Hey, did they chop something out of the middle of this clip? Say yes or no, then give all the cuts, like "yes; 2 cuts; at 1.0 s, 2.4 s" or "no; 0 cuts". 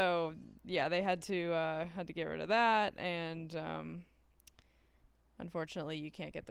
no; 0 cuts